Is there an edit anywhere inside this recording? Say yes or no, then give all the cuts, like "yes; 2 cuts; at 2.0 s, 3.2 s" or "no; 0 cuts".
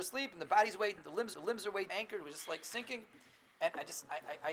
yes; 3 cuts; at 1.0 s, 1.3 s, 1.9 s